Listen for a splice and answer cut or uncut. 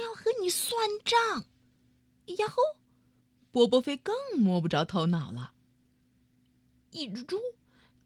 cut